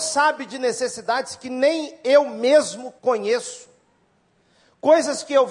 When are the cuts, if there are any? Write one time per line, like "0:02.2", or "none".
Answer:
0:03.0